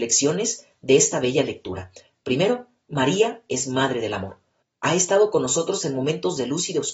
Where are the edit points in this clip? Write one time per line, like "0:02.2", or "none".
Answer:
none